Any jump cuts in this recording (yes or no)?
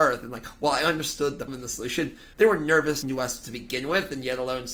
yes